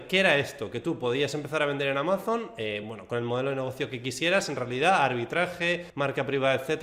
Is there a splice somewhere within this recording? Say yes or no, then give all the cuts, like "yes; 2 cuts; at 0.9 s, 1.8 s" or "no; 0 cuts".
no; 0 cuts